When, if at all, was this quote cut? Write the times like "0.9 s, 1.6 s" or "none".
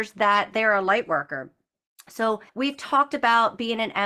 2.5 s